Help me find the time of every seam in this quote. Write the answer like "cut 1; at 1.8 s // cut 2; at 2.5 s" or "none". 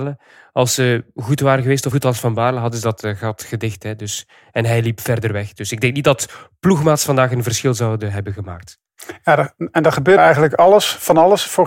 cut 1; at 1.9 s // cut 2; at 10.2 s

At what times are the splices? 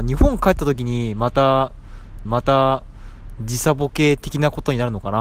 cut 1; at 2.3 s

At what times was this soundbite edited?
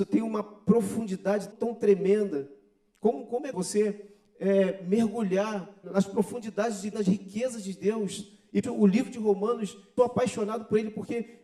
cut 1; at 1.5 s // cut 2; at 3.5 s // cut 3; at 5.8 s // cut 4; at 6.9 s // cut 5; at 8.6 s // cut 6; at 10.0 s

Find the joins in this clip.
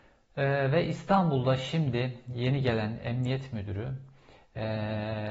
none

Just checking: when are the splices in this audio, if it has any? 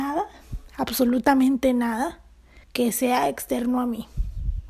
cut 1; at 2.6 s

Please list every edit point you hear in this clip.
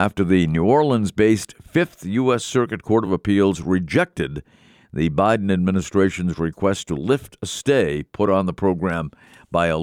none

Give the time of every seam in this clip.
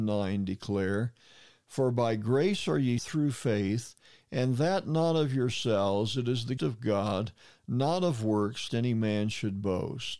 cut 1; at 3.0 s // cut 2; at 6.6 s // cut 3; at 8.7 s

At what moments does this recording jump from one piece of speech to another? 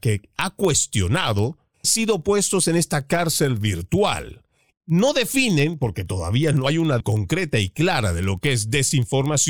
cut 1; at 1.8 s // cut 2; at 4.7 s // cut 3; at 7.0 s

